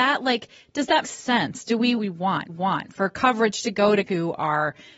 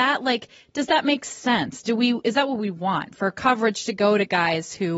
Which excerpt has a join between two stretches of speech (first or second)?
first